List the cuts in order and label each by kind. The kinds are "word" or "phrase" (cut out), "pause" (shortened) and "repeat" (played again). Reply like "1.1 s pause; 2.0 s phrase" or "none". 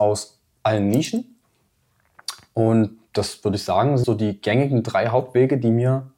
4.0 s word